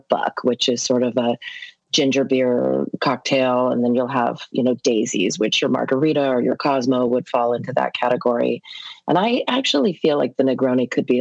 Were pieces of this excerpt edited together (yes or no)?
no